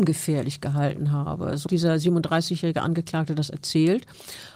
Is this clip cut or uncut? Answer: cut